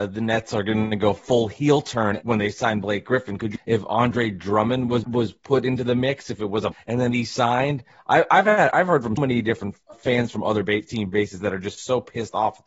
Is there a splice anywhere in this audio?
yes; 6 cuts; at 2.2 s, 3.6 s, 5.0 s, 6.7 s, 9.2 s, 9.9 s

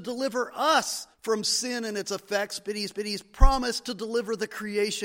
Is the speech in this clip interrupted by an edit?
yes; 2 cuts; at 1.1 s, 2.9 s

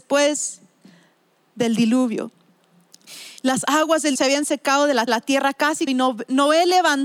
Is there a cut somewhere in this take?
yes; 4 cuts; at 3.4 s, 4.1 s, 5.1 s, 5.9 s

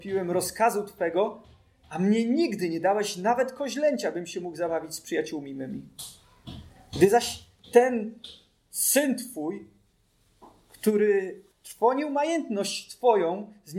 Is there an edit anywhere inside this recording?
yes; 1 cut; at 11.5 s

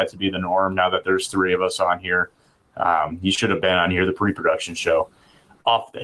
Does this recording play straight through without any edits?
yes; 0 cuts

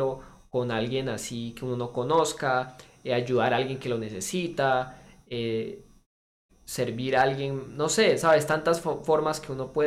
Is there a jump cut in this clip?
no; 0 cuts

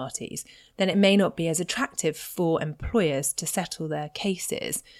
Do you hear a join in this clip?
no; 0 cuts

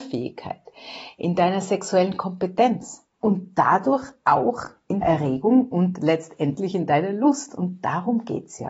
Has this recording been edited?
yes; 1 cut; at 5.0 s

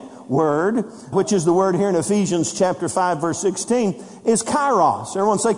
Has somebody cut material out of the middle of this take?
yes; 1 cut; at 1.1 s

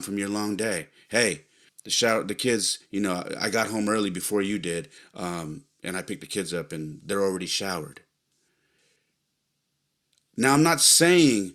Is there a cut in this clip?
yes; 1 cut; at 1.7 s

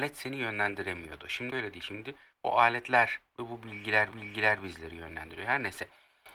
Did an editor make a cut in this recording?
yes; 3 cuts; at 1.5 s, 2.3 s, 4.1 s

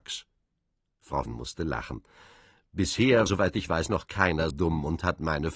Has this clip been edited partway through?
yes; 3 cuts; at 1.3 s, 3.3 s, 4.5 s

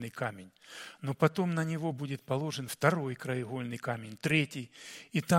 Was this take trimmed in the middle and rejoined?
no; 0 cuts

